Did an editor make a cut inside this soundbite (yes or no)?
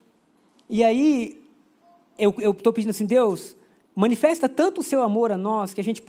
no